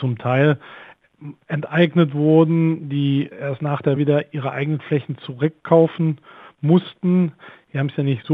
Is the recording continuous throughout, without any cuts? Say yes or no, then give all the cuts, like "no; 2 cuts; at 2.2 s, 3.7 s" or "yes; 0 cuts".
no; 2 cuts; at 3.3 s, 4.0 s